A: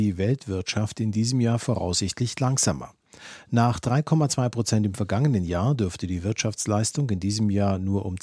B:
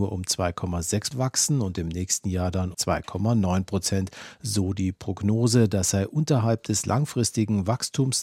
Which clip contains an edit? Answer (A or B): B